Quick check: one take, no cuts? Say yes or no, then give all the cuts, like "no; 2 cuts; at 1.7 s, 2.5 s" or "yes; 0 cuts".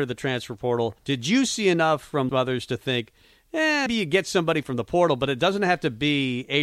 no; 3 cuts; at 1.0 s, 2.3 s, 3.9 s